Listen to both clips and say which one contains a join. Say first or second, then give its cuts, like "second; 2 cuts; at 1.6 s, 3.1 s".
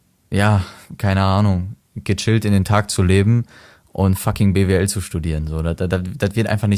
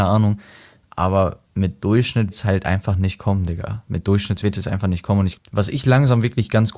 second; 4 cuts; at 1.5 s, 2.3 s, 4.4 s, 5.4 s